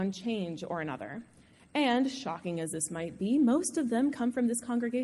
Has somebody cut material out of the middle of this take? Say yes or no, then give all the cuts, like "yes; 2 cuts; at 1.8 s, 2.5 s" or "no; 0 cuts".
no; 0 cuts